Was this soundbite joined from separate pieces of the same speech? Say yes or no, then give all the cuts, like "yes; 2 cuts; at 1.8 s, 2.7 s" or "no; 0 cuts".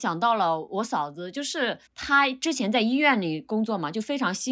yes; 1 cut; at 1.9 s